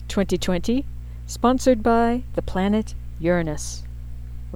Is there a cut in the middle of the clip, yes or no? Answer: no